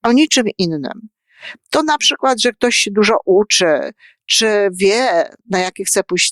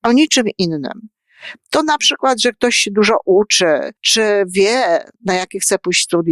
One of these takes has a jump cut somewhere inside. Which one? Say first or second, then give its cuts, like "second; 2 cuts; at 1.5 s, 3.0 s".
second; 1 cut; at 4.0 s